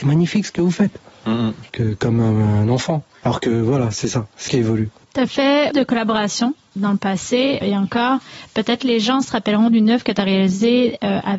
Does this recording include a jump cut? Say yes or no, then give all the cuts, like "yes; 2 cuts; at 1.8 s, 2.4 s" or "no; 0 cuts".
yes; 6 cuts; at 1.7 s, 3.1 s, 4.5 s, 5.7 s, 6.8 s, 7.6 s